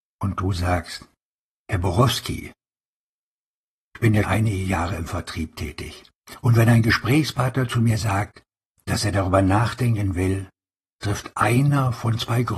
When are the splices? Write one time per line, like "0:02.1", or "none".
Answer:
0:04.2